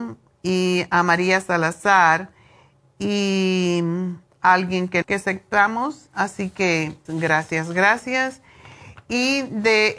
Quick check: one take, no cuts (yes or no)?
no